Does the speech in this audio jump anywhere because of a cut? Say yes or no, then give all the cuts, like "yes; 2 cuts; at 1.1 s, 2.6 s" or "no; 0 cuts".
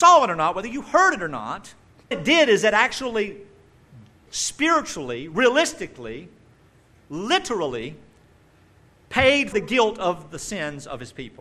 yes; 3 cuts; at 2.1 s, 4.3 s, 9.5 s